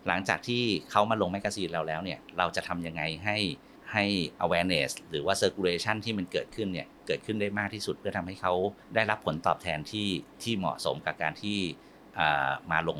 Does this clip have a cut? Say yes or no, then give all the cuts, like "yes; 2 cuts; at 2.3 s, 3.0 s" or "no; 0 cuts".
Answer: yes; 2 cuts; at 3.8 s, 8.8 s